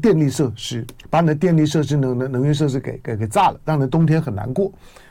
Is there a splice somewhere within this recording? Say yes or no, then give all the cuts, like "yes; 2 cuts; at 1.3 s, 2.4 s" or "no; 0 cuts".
yes; 1 cut; at 1.0 s